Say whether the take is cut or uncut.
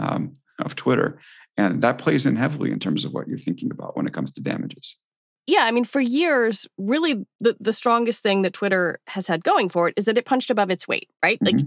uncut